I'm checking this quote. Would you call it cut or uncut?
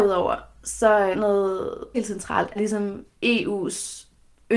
cut